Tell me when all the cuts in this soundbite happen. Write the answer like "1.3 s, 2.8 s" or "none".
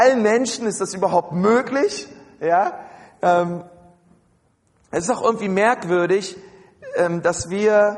none